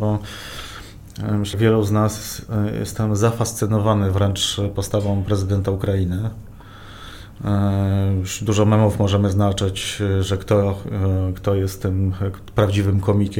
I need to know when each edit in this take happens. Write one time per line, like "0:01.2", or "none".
0:01.5